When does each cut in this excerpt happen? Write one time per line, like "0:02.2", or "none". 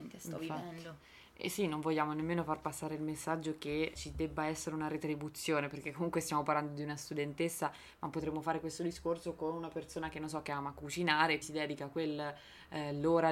0:04.0
0:11.4